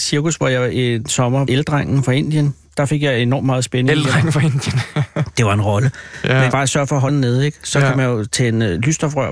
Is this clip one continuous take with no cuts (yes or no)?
no